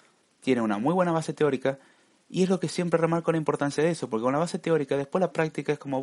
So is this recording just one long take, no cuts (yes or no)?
yes